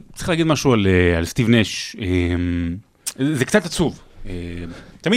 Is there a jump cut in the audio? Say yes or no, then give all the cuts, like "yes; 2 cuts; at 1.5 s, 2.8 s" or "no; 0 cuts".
no; 0 cuts